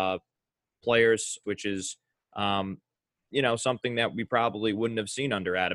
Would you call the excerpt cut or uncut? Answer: cut